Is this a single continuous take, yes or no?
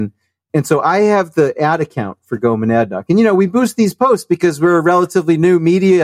yes